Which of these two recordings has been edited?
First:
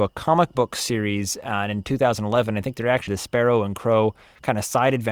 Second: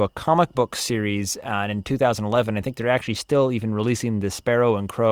first; 1 cut; at 3.1 s

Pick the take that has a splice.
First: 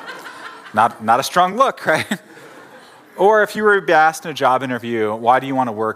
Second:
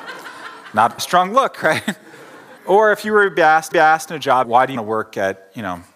second; 5 cuts; at 1.0 s, 2.6 s, 3.7 s, 4.4 s, 4.8 s

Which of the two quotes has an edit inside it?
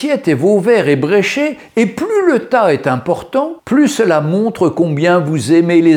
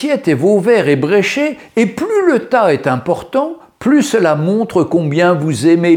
first; 1 cut; at 3.6 s

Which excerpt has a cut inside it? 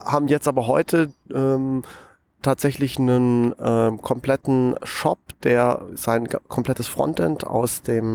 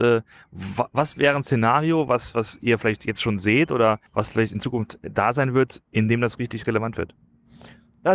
second; 2 cuts; at 4.1 s, 5.9 s

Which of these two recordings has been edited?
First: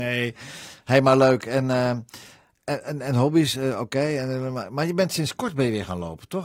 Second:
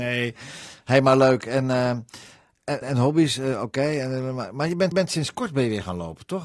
second; 2 cuts; at 2.8 s, 4.9 s

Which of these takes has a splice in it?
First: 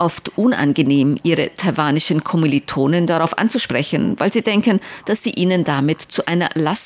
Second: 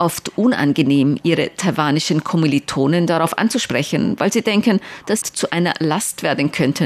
second; 1 cut; at 5.2 s

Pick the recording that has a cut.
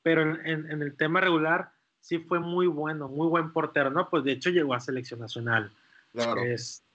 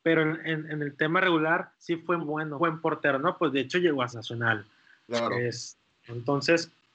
second; 4 cuts; at 1.7 s, 2.2 s, 2.6 s, 4.1 s

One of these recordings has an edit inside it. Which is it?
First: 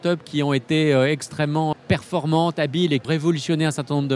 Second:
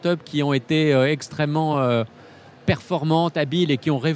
first; 2 cuts; at 1.7 s, 3.0 s

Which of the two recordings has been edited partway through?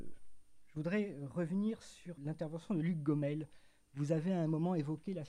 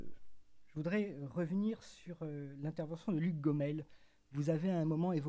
first; 1 cut; at 2.2 s

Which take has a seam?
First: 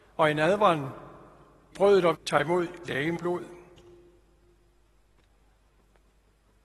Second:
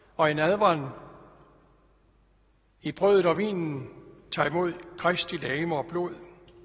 first; 4 cuts; at 1.7 s, 2.1 s, 2.8 s, 3.2 s

